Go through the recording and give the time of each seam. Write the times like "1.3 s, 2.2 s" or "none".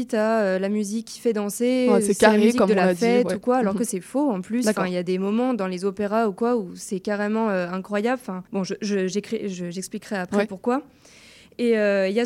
8.5 s